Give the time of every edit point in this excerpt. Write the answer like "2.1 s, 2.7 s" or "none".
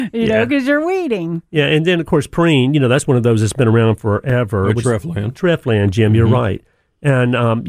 4.8 s